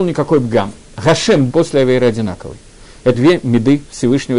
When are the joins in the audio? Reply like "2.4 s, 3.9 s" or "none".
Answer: 1.5 s, 3.1 s